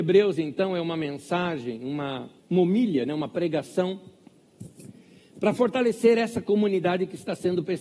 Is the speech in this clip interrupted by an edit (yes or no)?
yes